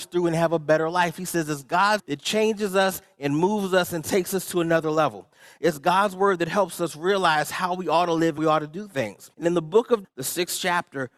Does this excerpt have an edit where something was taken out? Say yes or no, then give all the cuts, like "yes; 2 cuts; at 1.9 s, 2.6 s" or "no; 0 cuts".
yes; 4 cuts; at 2.0 s, 8.4 s, 9.3 s, 10.0 s